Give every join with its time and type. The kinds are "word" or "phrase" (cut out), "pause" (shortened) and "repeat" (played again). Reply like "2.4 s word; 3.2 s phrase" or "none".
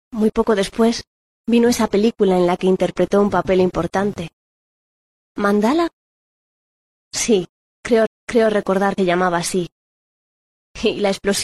8.1 s repeat; 9.0 s word